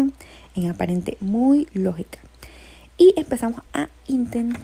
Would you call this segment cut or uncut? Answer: uncut